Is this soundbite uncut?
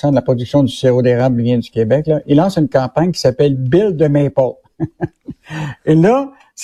yes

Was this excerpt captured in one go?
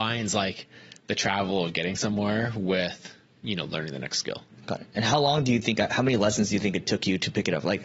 yes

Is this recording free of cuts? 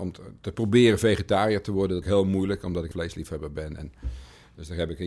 no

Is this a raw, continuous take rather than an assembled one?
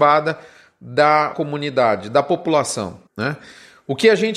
no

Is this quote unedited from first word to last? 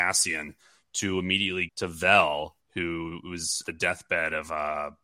no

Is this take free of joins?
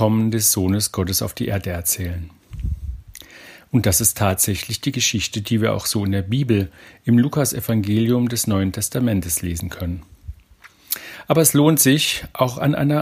yes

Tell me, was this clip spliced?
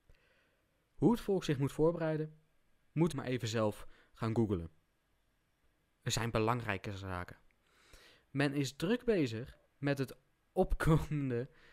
yes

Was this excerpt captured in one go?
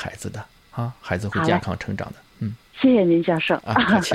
no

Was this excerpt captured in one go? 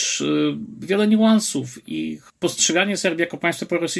yes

